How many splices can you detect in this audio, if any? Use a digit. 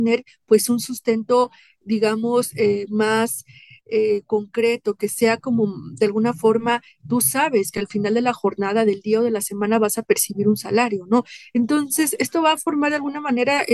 0